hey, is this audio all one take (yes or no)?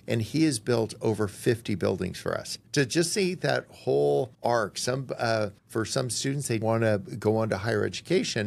no